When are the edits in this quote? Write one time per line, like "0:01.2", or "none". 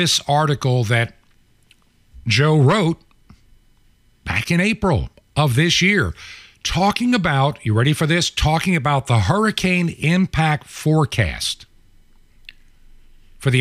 none